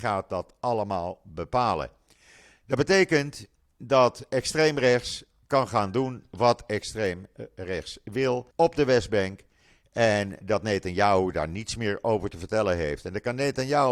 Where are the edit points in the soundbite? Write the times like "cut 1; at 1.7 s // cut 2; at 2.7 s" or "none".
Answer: cut 1; at 8.5 s // cut 2; at 10.4 s